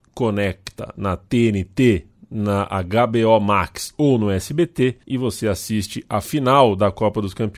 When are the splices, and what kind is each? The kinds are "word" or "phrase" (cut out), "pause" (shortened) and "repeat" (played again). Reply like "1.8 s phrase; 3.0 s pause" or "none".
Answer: 5.0 s pause